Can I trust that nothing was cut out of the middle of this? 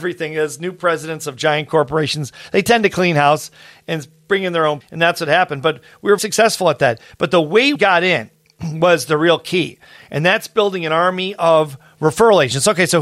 no; 3 cuts; at 4.8 s, 6.2 s, 7.7 s

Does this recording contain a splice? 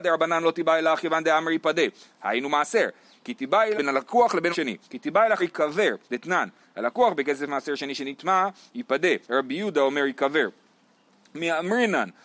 yes; 6 cuts; at 3.7 s, 4.5 s, 4.8 s, 5.4 s, 6.0 s, 9.2 s

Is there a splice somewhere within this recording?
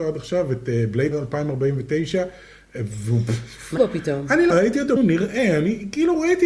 yes; 4 cuts; at 1.1 s, 3.8 s, 4.5 s, 5.0 s

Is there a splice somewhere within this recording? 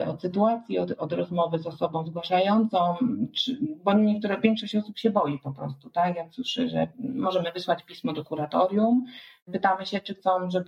no; 0 cuts

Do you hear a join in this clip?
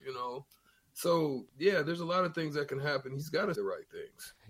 yes; 2 cuts; at 1.5 s, 3.6 s

